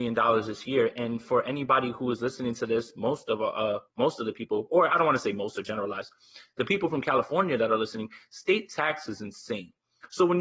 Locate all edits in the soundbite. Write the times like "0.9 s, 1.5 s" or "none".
3.9 s